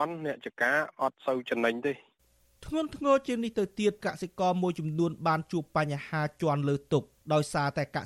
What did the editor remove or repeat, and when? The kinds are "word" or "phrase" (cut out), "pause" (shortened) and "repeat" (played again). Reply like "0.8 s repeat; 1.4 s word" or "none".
none